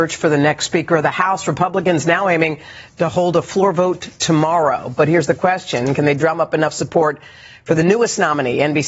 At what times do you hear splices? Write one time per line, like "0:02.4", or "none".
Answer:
none